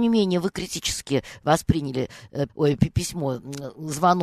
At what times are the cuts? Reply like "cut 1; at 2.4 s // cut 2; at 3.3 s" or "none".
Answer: cut 1; at 2.5 s